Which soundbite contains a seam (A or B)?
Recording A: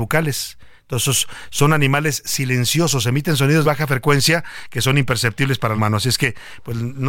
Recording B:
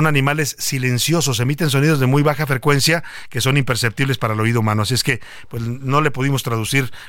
A